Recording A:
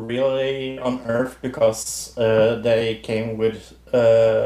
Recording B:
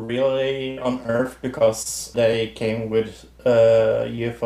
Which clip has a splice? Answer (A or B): B